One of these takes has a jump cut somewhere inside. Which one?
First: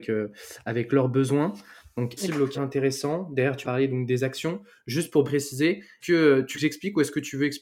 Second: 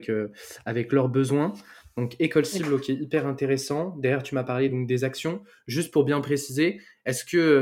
first; 6 cuts; at 2.2 s, 2.5 s, 3.6 s, 5.2 s, 6.0 s, 6.5 s

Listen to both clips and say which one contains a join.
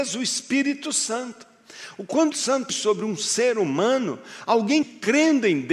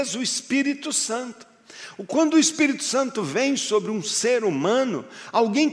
first; 3 cuts; at 2.3 s, 2.7 s, 4.8 s

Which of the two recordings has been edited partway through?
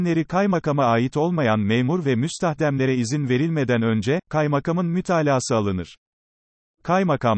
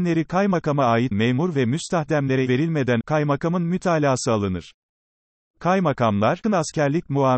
second; 4 cuts; at 1.1 s, 2.5 s, 3.0 s, 6.4 s

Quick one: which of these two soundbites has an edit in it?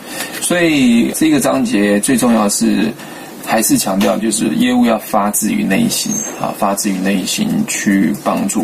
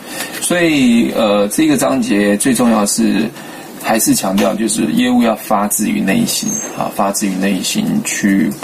first; 1 cut; at 1.1 s

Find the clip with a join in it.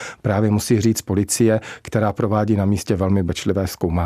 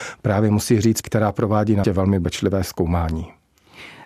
second; 2 cuts; at 1.0 s, 1.8 s

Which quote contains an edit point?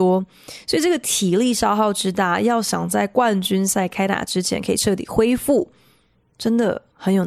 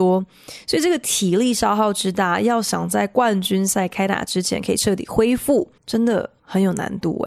second; 1 cut; at 5.8 s

